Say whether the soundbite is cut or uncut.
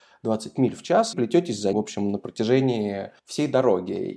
cut